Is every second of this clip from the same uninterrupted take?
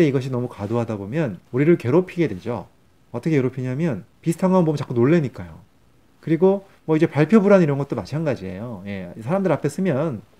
no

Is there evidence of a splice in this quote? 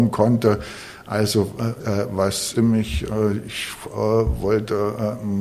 yes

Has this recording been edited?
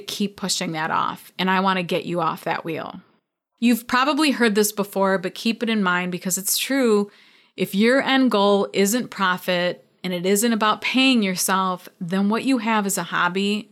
no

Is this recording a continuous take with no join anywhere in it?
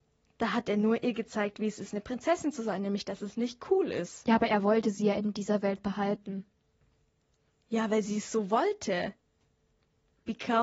yes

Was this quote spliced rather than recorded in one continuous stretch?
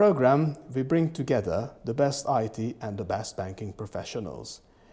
no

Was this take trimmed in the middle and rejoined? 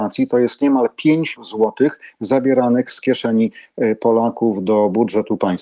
yes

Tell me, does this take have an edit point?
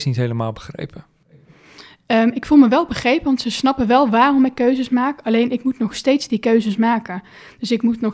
no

